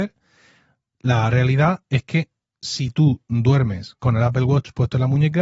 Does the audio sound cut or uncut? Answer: uncut